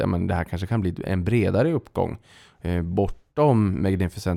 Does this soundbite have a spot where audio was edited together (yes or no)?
no